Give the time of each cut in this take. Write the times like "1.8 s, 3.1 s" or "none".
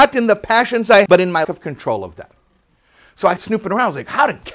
1.1 s, 1.4 s, 3.4 s